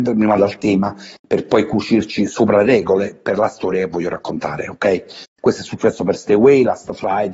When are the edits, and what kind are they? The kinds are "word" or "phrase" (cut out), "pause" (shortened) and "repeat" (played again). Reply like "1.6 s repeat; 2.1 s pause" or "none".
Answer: none